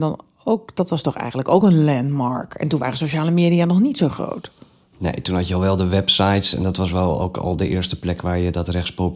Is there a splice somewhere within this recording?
no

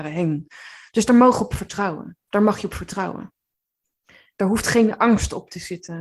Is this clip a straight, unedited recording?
yes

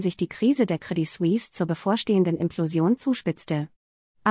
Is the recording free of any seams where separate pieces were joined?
yes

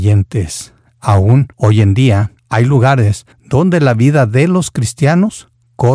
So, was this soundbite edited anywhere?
yes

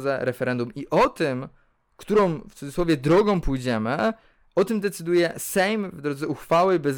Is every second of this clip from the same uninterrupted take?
yes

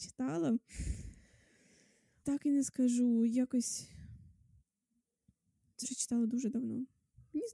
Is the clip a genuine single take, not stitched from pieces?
no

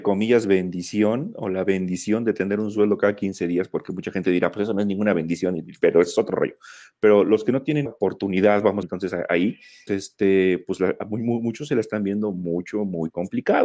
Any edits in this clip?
yes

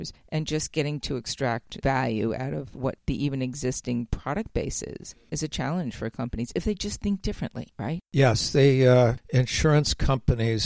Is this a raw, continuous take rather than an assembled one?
no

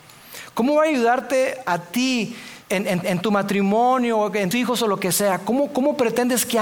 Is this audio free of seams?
no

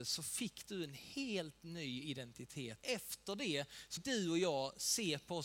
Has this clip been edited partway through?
yes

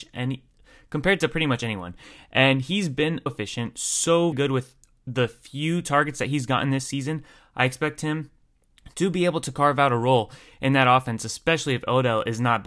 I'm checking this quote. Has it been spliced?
yes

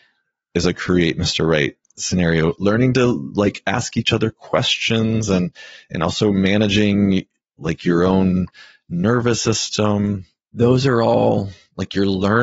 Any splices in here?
no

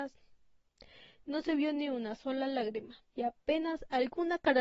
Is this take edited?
yes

